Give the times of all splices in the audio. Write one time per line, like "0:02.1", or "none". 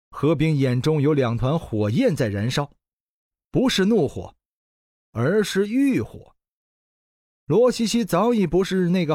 none